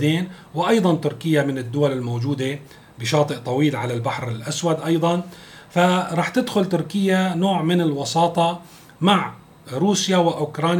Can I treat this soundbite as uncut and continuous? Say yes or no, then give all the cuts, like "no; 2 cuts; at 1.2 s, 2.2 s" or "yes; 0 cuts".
yes; 0 cuts